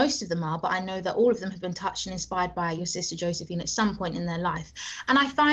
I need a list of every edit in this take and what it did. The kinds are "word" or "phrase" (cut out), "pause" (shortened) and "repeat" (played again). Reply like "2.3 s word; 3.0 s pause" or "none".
none